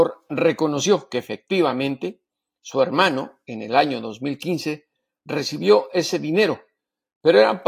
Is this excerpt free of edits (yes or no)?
yes